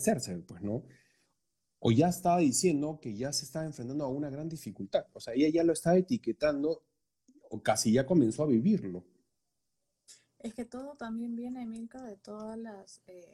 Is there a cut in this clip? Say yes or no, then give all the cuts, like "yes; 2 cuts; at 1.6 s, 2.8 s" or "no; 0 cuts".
no; 0 cuts